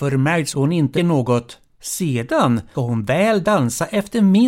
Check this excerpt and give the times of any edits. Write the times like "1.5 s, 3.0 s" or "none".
1.0 s, 2.7 s